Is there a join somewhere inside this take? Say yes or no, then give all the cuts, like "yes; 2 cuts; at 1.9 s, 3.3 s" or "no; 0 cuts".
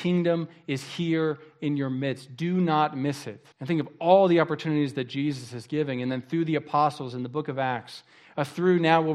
yes; 1 cut; at 3.5 s